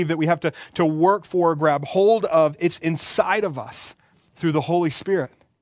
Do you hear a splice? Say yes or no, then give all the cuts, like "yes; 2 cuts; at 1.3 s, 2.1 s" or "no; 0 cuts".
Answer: no; 0 cuts